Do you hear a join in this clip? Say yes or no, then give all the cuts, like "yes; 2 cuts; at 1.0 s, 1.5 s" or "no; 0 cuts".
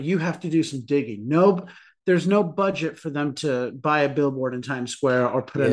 no; 0 cuts